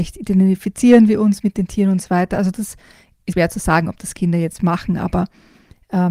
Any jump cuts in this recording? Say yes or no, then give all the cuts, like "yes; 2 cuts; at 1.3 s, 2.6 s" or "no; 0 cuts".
yes; 2 cuts; at 3.3 s, 4.6 s